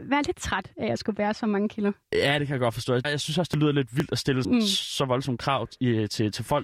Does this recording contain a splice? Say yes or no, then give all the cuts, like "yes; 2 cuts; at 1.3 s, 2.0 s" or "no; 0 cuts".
yes; 3 cuts; at 2.0 s, 3.0 s, 4.4 s